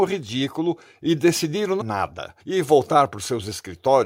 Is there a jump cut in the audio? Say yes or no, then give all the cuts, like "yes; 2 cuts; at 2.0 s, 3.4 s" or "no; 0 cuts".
yes; 2 cuts; at 1.8 s, 2.4 s